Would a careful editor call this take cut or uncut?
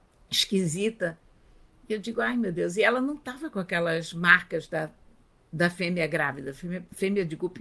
uncut